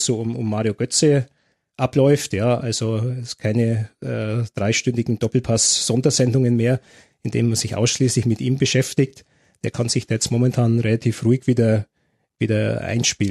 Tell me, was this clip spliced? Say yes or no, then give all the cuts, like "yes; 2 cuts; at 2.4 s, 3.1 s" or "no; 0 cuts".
no; 0 cuts